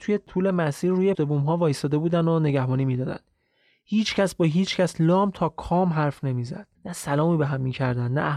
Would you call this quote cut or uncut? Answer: cut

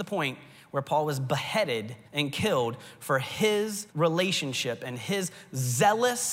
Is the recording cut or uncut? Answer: cut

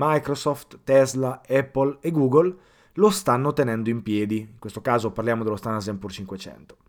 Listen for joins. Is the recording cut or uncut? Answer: uncut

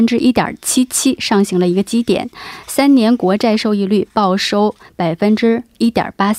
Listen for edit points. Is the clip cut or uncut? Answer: uncut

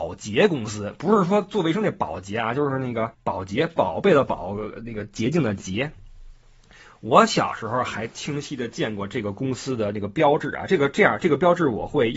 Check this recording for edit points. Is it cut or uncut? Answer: cut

